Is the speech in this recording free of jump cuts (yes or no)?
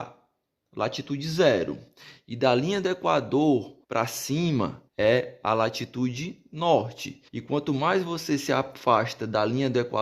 no